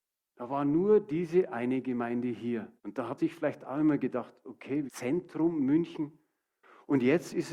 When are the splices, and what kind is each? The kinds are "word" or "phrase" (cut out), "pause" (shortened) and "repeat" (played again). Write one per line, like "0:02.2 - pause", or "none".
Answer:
0:02.8 - pause
0:03.2 - word
0:04.9 - phrase